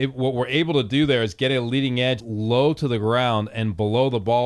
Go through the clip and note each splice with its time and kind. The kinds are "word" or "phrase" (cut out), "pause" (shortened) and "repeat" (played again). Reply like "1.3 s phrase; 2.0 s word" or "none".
2.2 s phrase